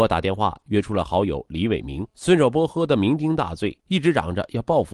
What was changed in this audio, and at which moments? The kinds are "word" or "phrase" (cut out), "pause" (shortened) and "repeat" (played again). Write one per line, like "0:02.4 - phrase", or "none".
0:02.1 - pause
0:03.8 - pause